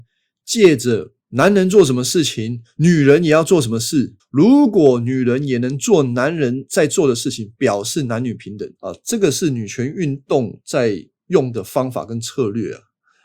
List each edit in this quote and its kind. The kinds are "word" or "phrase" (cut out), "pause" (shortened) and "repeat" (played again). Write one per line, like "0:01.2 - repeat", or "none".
0:01.2 - pause
0:04.2 - pause
0:08.8 - pause

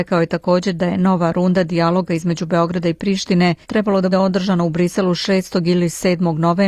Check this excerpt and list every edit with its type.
0:03.6 - pause
0:04.1 - word

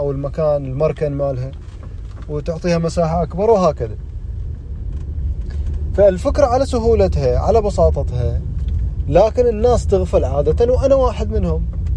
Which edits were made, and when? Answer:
none

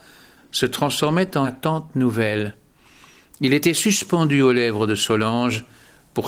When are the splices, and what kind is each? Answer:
0:01.4 - word

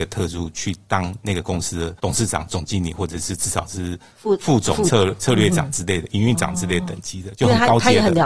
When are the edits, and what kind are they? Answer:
0:02.0 - pause

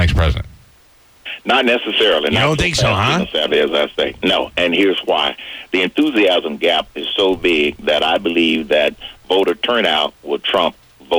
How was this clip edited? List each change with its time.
none

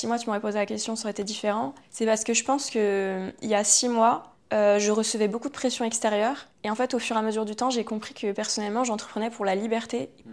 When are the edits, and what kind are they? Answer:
none

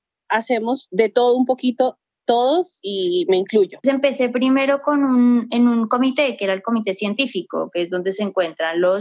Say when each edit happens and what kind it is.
none

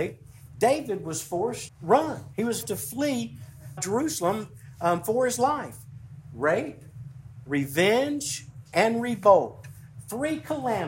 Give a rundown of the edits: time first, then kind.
0:01.7 - word
0:02.6 - word
0:03.8 - word

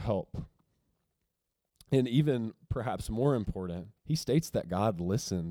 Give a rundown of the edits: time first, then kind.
0:04.0 - pause

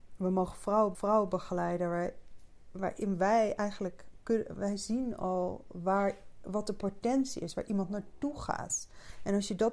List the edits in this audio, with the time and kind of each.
0:00.9 - repeat

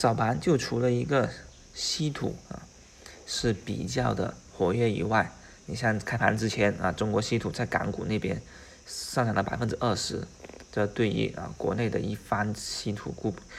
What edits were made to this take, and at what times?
0:02.4 - pause

